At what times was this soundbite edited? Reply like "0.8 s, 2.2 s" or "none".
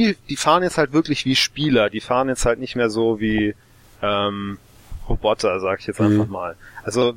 none